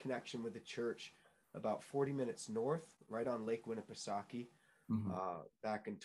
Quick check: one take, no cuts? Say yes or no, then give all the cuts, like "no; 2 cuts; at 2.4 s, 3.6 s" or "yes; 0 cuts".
yes; 0 cuts